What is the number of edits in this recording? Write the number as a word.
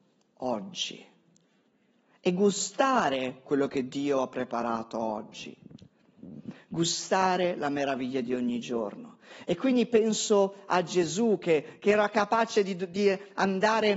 zero